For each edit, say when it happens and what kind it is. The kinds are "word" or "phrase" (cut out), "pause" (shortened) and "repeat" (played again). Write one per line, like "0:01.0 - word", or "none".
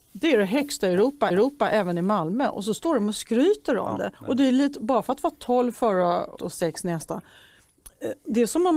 0:01.3 - repeat
0:04.2 - pause
0:06.4 - word

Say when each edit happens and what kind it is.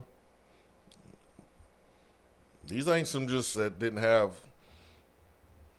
0:03.5 - phrase

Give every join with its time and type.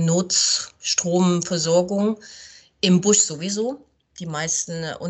none

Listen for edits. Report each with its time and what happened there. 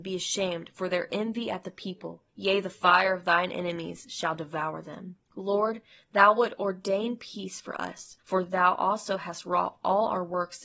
0:02.3 - pause
0:05.2 - pause
0:08.2 - pause

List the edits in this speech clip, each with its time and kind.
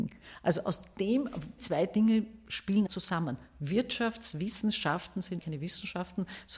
0:01.6 - word
0:02.9 - word
0:05.4 - word

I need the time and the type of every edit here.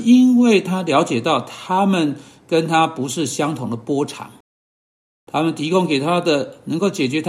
none

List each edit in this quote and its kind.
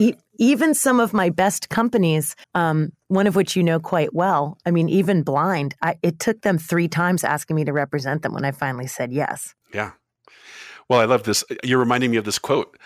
0:02.4 - pause
0:09.6 - pause

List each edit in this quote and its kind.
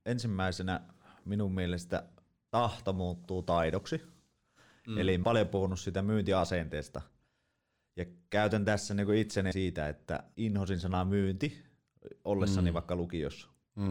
0:02.5 - word
0:05.2 - word
0:09.5 - word
0:10.3 - word

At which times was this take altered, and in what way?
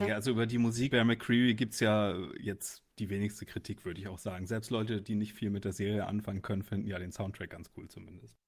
0:00.9 - word

